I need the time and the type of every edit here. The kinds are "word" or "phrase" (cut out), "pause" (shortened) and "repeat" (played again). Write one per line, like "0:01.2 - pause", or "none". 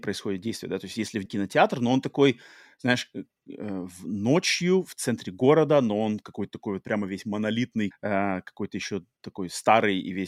0:01.3 - phrase
0:07.9 - phrase